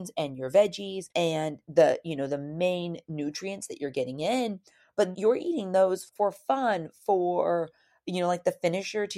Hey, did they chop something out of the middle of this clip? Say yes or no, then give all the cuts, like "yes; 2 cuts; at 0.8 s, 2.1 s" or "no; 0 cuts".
yes; 3 cuts; at 1.1 s, 5.1 s, 6.1 s